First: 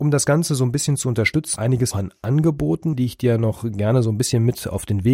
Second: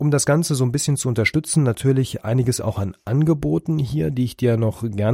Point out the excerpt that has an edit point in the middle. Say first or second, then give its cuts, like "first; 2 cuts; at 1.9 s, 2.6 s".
first; 3 cuts; at 1.6 s, 1.9 s, 2.9 s